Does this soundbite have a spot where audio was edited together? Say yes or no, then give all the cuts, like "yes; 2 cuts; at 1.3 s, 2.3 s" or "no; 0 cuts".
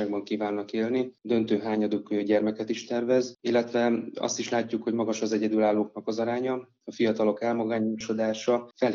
no; 0 cuts